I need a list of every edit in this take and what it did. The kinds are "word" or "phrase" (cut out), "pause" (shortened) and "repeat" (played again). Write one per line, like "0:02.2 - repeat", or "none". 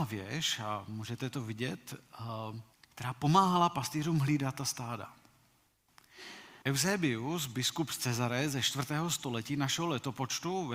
0:02.7 - pause
0:06.6 - pause